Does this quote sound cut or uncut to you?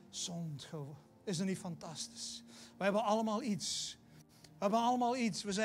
uncut